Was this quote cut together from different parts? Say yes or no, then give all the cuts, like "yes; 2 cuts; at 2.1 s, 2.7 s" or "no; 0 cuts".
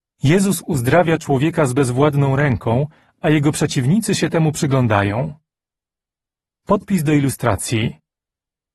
no; 0 cuts